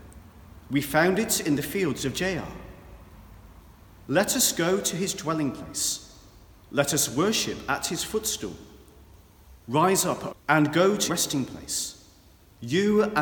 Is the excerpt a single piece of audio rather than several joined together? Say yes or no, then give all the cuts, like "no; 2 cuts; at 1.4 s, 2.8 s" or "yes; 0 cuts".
no; 3 cuts; at 9.6 s, 10.3 s, 11.1 s